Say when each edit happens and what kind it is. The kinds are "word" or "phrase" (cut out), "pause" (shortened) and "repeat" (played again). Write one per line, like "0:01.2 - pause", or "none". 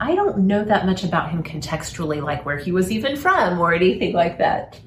none